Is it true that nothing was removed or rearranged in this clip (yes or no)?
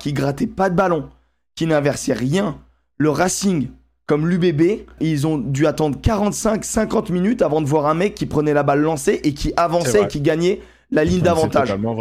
no